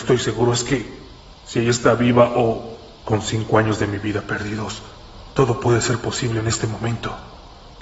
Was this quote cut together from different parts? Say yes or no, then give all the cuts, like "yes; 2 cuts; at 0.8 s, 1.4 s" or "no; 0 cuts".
no; 0 cuts